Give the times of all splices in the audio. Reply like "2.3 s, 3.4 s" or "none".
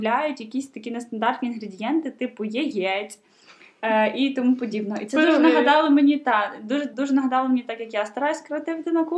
6.9 s